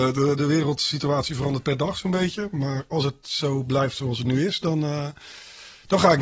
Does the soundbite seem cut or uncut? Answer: uncut